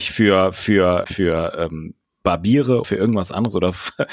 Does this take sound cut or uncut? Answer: cut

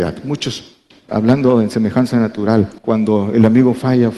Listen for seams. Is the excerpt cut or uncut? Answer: cut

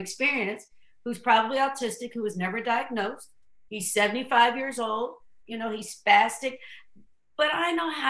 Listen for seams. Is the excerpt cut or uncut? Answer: uncut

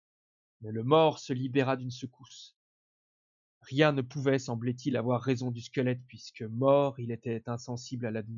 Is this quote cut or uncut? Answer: uncut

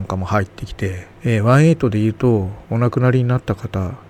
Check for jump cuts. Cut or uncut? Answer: cut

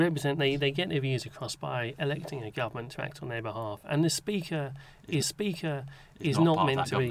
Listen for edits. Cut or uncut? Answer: cut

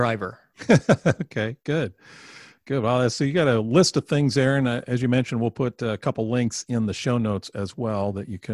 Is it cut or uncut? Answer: uncut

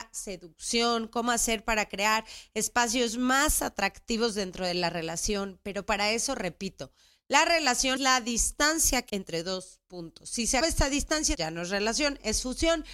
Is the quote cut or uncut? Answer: cut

